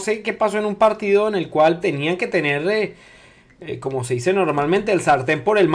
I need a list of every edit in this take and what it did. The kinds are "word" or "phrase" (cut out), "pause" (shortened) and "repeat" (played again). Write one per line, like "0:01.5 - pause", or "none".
0:01.8 - word